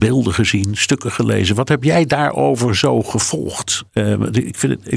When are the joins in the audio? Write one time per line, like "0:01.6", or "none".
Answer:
0:03.9